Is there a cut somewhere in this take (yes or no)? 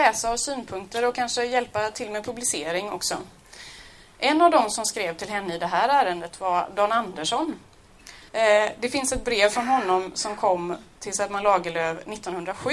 yes